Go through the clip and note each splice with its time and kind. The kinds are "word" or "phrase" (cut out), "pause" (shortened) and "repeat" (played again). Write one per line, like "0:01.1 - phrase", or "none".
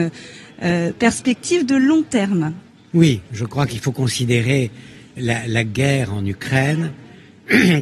0:02.7 - pause
0:05.2 - word